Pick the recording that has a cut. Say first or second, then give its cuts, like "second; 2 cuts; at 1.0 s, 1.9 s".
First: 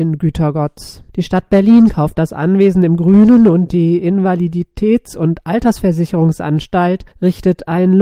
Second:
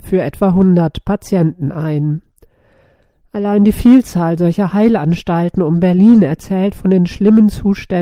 first; 2 cuts; at 1.1 s, 7.1 s